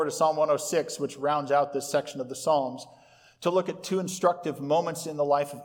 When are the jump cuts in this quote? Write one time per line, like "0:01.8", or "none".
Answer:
none